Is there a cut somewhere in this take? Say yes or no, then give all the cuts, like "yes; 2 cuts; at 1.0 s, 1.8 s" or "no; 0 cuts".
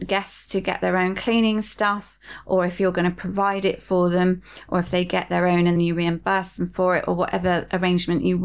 yes; 1 cut; at 5.8 s